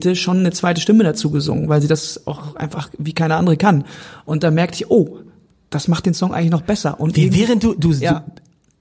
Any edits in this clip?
no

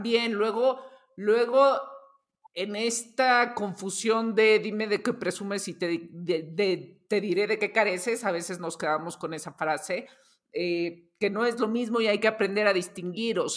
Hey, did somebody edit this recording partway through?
no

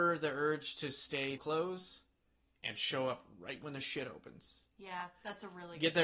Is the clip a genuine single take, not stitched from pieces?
no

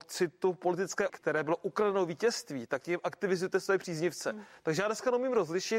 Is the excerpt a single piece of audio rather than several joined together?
no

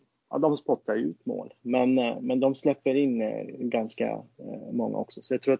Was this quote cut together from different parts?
no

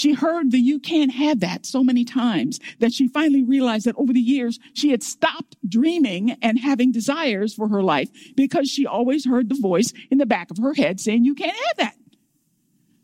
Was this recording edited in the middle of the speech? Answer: no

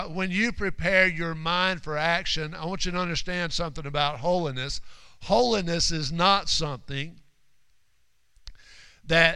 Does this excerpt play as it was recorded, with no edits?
yes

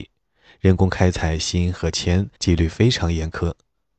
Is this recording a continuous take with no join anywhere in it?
no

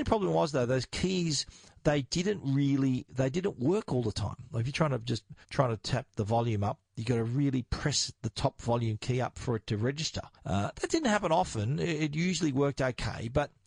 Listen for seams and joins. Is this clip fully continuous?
no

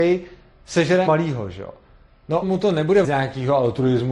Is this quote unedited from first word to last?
no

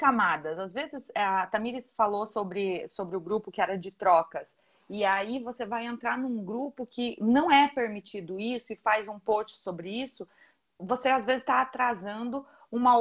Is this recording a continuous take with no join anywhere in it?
yes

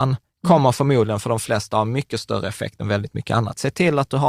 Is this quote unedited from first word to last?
yes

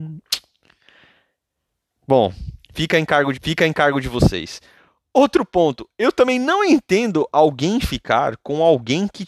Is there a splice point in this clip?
yes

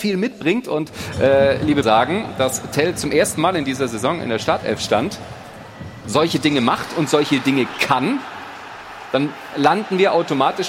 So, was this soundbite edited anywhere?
yes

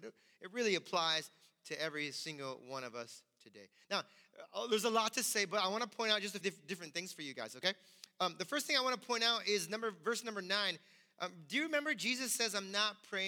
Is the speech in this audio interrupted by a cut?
yes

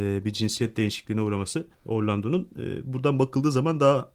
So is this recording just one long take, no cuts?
no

